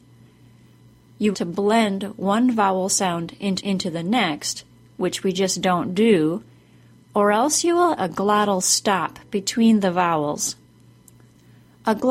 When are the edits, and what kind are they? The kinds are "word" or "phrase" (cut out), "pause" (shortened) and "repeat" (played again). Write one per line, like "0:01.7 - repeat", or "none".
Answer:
0:01.3 - phrase
0:03.6 - repeat
0:08.0 - word